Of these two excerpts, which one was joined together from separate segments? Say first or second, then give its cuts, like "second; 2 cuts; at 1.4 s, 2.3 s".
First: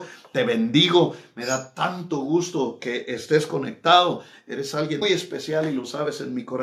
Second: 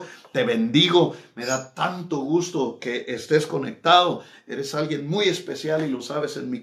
first; 1 cut; at 5.0 s